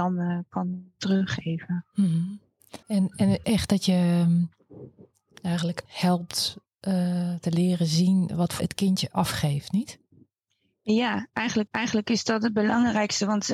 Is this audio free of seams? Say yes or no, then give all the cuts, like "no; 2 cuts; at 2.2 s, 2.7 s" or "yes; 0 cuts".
no; 5 cuts; at 2.8 s, 3.4 s, 5.9 s, 8.6 s, 11.7 s